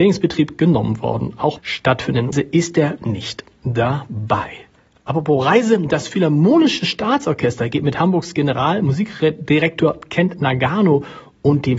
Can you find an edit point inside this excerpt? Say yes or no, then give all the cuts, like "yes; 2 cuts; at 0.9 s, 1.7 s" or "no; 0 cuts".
yes; 4 cuts; at 1.6 s, 2.3 s, 3.0 s, 4.8 s